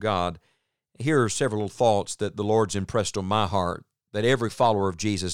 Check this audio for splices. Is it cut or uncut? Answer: uncut